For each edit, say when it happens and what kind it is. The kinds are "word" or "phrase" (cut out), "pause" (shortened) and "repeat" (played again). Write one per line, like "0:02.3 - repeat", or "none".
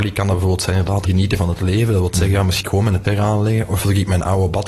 0:01.1 - word
0:02.6 - word
0:03.0 - word

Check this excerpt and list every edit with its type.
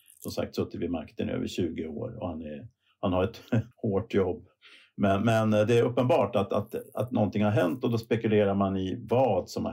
0:02.9 - pause
0:03.7 - pause

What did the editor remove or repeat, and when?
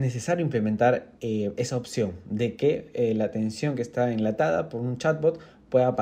0:01.2 - pause

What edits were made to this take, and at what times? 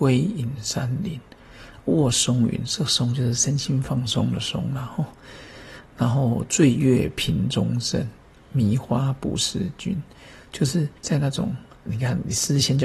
0:11.0 - pause

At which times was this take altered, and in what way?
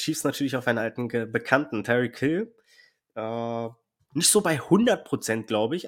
none

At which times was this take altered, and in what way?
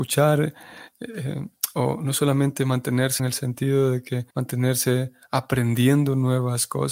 0:03.2 - word
0:04.3 - pause

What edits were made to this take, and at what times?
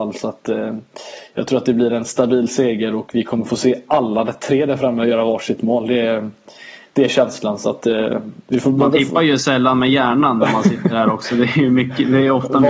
none

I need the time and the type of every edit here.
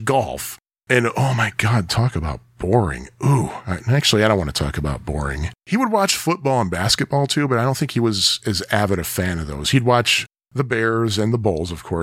0:05.6 - pause

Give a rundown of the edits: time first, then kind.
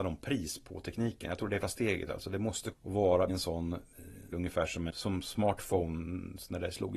0:01.6 - word
0:02.7 - phrase
0:03.3 - word
0:04.3 - phrase
0:04.9 - word

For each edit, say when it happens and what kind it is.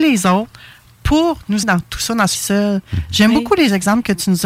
0:01.6 - word
0:02.3 - phrase

